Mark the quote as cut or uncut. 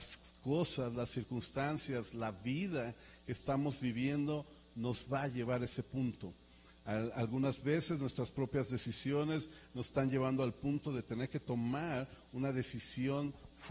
uncut